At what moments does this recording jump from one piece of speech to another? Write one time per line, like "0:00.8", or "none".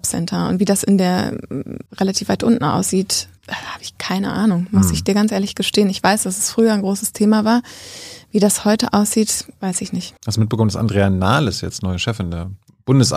0:01.9
0:03.4
0:10.2